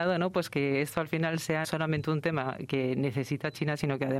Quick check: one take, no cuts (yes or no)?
no